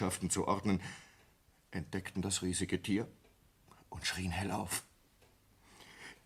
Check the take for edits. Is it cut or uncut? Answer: uncut